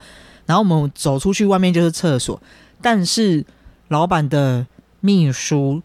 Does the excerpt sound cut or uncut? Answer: uncut